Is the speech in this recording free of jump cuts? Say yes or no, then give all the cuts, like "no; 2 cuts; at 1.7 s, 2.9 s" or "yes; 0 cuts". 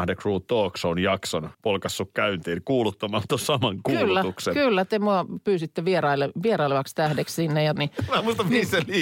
no; 2 cuts; at 1.5 s, 7.8 s